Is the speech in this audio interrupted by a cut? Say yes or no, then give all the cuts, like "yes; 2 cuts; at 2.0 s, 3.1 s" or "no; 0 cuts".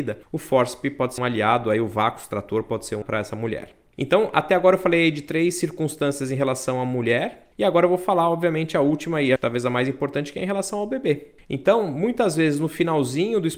yes; 3 cuts; at 1.2 s, 3.0 s, 9.4 s